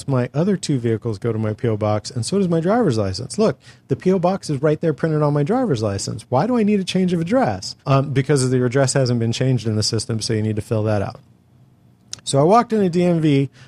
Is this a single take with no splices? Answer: no; 1 cut; at 7.8 s

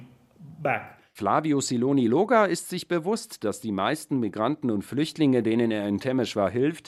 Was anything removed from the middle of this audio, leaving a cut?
no; 0 cuts

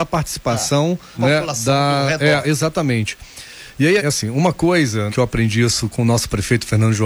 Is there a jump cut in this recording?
yes; 5 cuts; at 1.1 s, 2.4 s, 4.0 s, 5.1 s, 5.9 s

